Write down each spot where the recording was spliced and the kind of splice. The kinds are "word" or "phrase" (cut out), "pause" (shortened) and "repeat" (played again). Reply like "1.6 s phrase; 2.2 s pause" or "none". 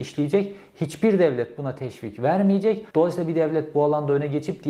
2.9 s pause